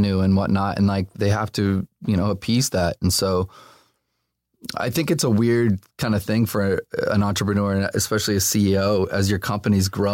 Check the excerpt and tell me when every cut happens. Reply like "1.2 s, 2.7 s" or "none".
1.1 s